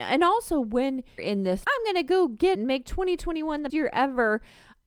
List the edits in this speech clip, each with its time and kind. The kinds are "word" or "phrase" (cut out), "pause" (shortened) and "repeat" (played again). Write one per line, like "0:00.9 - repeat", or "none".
0:01.2 - word
0:01.6 - word
0:02.5 - word
0:03.7 - word